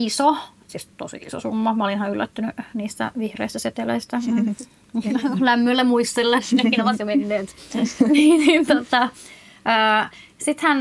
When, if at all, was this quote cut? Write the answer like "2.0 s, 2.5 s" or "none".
0.9 s